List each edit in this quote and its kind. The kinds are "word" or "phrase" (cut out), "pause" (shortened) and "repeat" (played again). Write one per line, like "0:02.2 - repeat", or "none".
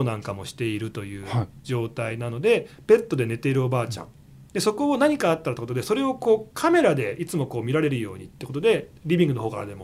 none